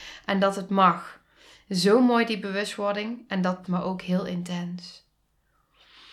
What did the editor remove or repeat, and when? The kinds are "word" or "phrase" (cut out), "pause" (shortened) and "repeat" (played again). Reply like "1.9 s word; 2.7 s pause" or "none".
3.6 s word